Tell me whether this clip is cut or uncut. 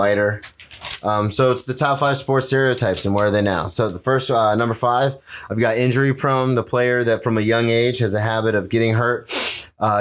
uncut